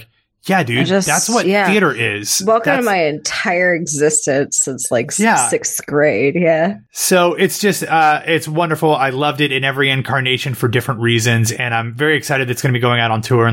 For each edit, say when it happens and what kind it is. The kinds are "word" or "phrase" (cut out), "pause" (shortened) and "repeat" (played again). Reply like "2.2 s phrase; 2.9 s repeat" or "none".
6.9 s pause